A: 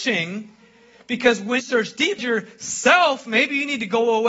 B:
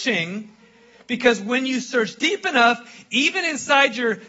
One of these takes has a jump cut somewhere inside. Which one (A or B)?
A